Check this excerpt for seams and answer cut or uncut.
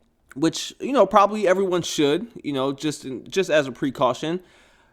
uncut